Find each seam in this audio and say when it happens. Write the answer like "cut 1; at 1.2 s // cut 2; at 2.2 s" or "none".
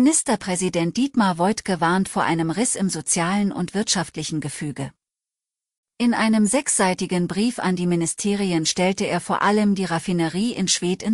none